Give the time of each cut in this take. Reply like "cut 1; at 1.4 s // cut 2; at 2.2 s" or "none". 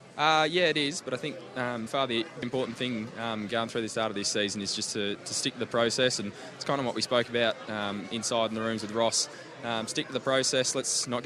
cut 1; at 1.9 s // cut 2; at 2.4 s